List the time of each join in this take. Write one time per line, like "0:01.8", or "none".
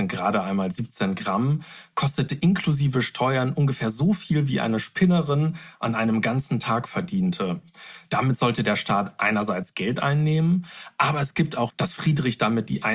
0:11.7